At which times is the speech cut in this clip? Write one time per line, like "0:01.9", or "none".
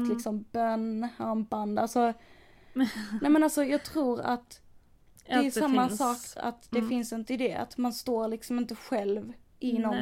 0:06.4
0:07.3